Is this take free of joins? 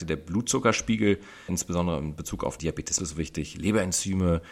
no; 3 cuts; at 1.5 s, 2.6 s, 3.0 s

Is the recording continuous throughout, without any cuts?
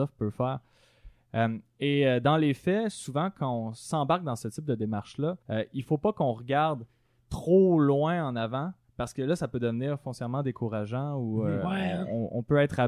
no; 1 cut; at 5.4 s

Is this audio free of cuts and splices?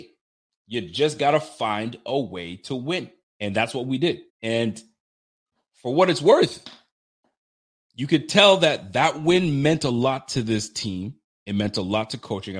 no; 2 cuts; at 3.2 s, 4.3 s

